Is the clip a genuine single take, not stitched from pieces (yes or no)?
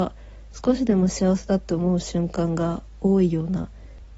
yes